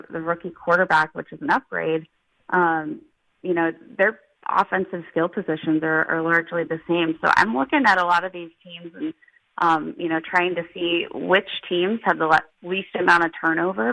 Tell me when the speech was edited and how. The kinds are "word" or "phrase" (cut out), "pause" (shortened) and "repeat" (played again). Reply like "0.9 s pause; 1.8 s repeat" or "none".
none